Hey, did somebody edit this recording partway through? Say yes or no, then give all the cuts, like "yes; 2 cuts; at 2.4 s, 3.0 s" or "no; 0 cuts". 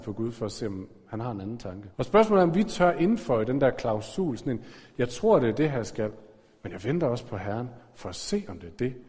yes; 1 cut; at 1.9 s